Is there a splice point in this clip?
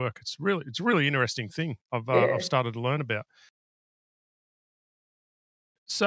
yes; 1 cut; at 1.8 s

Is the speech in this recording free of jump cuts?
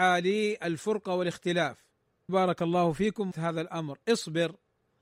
no; 2 cuts; at 2.3 s, 3.3 s

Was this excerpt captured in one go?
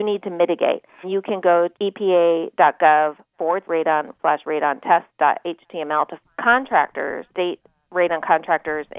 no; 6 cuts; at 1.0 s, 1.7 s, 3.6 s, 4.2 s, 6.2 s, 7.3 s

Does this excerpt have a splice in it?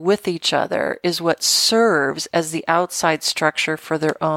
no; 0 cuts

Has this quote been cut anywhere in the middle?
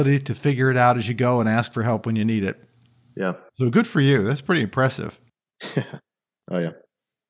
no; 0 cuts

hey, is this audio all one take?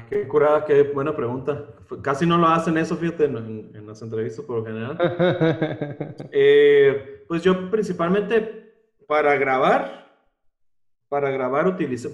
yes; 0 cuts

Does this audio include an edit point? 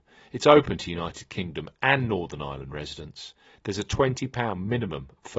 no; 0 cuts

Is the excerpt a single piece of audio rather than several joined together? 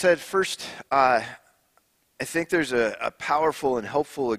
yes; 0 cuts

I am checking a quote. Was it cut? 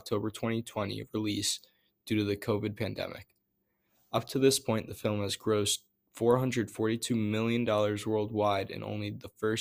no; 0 cuts

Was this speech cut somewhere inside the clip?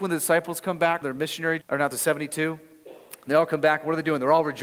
yes; 3 cuts; at 1.0 s, 1.6 s, 1.9 s

